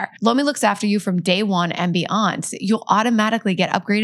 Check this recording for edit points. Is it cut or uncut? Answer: uncut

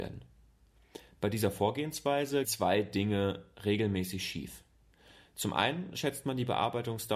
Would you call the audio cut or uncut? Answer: cut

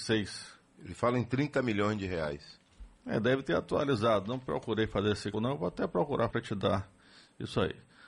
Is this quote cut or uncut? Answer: cut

